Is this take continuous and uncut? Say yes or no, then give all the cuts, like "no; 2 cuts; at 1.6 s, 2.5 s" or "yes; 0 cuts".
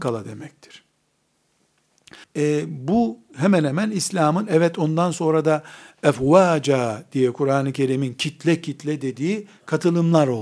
no; 1 cut; at 2.2 s